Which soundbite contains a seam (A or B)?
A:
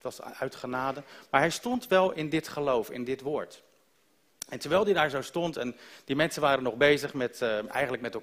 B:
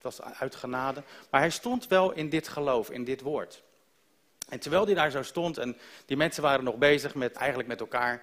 B